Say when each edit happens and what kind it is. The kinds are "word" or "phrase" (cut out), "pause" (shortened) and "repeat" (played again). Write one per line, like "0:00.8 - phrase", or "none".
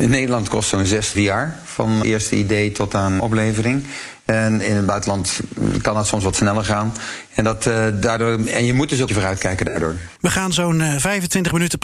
0:01.1 - word
0:02.0 - word
0:03.2 - word
0:09.1 - phrase
0:10.2 - pause